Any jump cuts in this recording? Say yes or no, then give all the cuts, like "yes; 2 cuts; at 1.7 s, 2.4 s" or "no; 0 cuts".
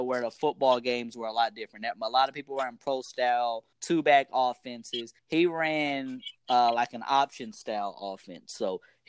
yes; 2 cuts; at 3.7 s, 5.2 s